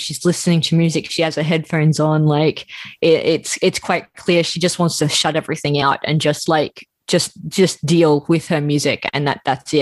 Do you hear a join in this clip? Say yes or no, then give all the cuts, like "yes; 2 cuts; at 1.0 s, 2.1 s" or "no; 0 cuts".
no; 0 cuts